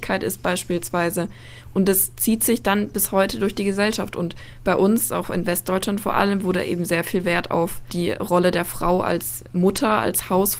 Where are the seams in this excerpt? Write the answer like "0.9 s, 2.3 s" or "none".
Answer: none